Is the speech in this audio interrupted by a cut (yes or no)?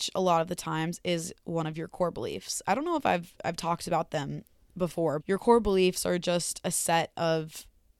yes